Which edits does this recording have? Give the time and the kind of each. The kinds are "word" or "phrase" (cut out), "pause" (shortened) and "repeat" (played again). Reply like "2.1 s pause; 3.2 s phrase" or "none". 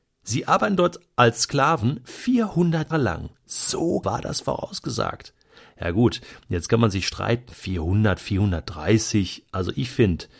2.9 s word; 4.0 s word